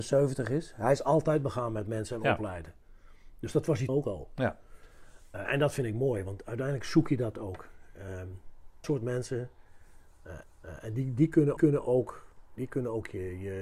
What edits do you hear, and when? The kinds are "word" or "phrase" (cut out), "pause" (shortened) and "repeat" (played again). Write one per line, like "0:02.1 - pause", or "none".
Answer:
0:03.9 - word
0:08.8 - word
0:10.4 - repeat
0:11.6 - repeat